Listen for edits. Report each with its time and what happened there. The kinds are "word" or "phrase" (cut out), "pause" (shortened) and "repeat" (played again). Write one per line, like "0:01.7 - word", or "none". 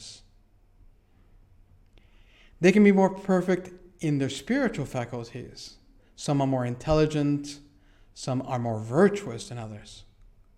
none